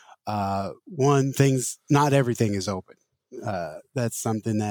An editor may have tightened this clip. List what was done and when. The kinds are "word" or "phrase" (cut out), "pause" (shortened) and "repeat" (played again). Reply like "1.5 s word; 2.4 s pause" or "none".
none

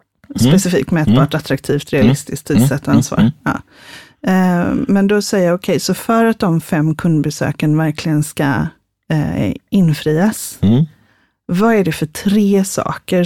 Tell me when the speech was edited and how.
none

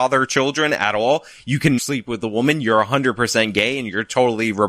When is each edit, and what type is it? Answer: 1.8 s word

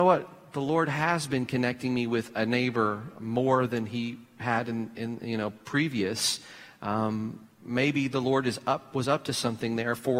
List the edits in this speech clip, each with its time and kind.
none

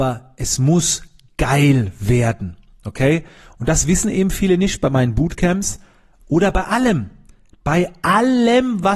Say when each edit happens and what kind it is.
none

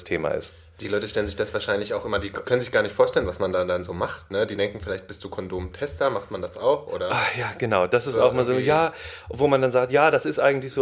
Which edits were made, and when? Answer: 2.4 s phrase

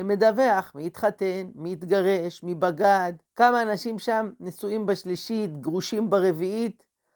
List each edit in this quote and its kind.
3.2 s pause

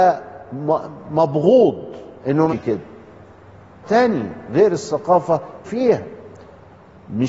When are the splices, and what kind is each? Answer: 2.2 s pause; 2.5 s word; 3.8 s word; 5.6 s phrase

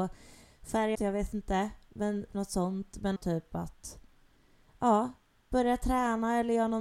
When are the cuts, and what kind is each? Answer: 0.9 s word; 2.3 s word; 3.2 s word

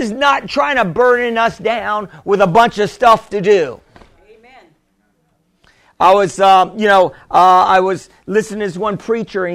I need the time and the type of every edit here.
none

